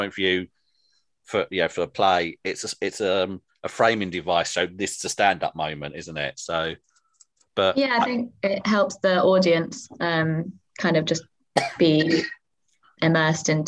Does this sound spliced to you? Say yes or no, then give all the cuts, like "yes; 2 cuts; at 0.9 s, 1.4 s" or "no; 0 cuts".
no; 0 cuts